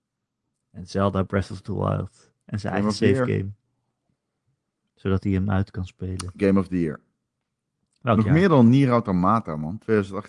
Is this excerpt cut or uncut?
uncut